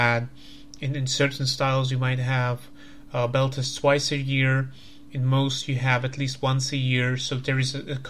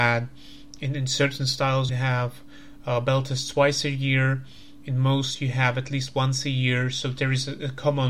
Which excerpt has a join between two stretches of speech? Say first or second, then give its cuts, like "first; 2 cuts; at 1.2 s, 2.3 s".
second; 1 cut; at 1.9 s